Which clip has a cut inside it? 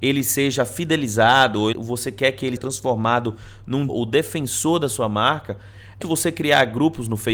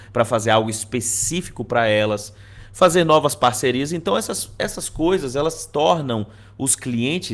first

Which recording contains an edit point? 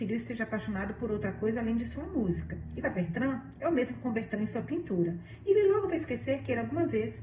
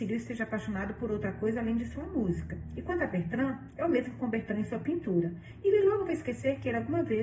first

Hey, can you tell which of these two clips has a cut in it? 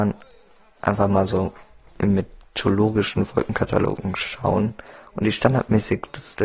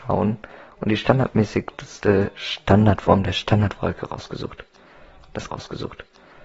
second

